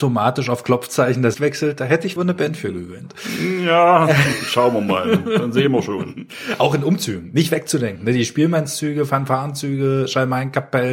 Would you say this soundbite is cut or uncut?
cut